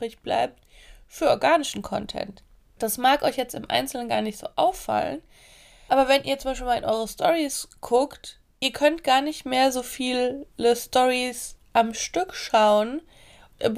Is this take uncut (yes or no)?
yes